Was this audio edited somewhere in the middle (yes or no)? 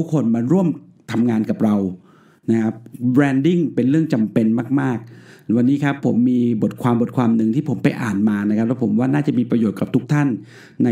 no